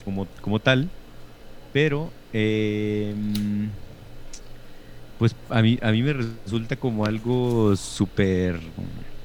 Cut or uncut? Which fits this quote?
uncut